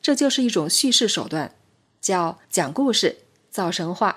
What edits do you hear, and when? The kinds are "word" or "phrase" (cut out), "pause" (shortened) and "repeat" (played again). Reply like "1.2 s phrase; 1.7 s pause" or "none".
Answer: 2.4 s pause